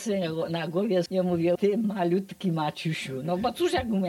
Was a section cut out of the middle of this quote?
yes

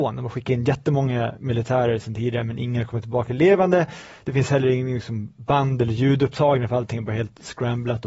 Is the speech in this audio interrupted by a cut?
no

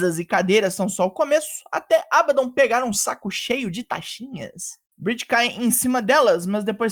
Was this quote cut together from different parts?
yes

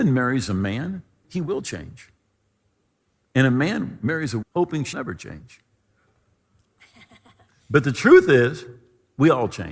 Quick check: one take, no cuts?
no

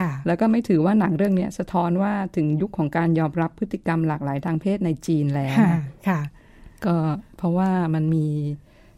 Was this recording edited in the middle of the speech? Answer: no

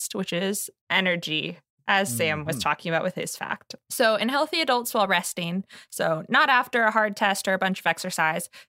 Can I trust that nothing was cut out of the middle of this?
yes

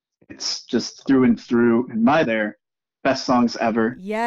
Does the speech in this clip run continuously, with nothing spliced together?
no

